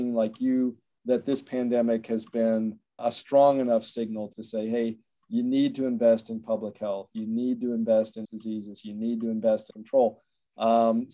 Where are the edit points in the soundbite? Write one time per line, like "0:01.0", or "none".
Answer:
0:03.0
0:04.3
0:08.2
0:09.7